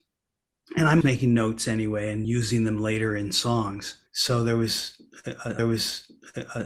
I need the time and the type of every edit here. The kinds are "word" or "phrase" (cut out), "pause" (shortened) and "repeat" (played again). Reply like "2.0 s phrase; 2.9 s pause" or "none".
1.0 s word; 2.2 s word; 4.1 s pause; 5.6 s repeat